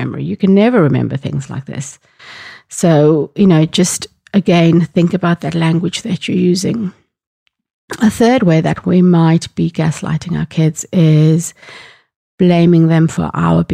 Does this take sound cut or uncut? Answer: uncut